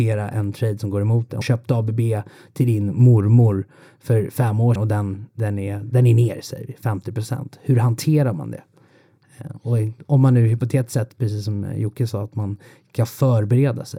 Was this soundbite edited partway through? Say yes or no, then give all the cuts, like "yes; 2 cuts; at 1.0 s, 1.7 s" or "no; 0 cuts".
yes; 2 cuts; at 1.4 s, 4.8 s